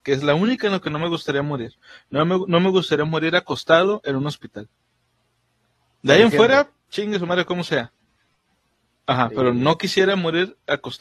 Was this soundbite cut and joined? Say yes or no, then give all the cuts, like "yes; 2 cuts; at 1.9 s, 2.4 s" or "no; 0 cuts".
no; 0 cuts